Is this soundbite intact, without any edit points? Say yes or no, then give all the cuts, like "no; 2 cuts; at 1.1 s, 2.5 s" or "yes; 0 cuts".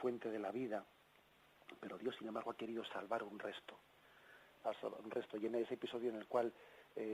yes; 0 cuts